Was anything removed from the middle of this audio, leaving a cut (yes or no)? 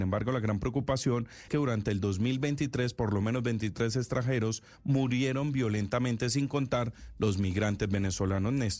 yes